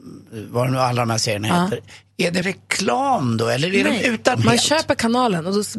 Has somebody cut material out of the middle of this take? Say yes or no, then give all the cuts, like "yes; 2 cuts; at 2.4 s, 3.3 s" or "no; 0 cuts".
yes; 2 cuts; at 2.4 s, 4.3 s